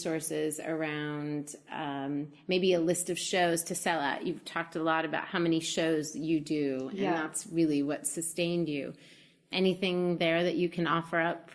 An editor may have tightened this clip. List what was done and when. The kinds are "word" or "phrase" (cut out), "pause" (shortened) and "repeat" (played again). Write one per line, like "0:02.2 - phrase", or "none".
none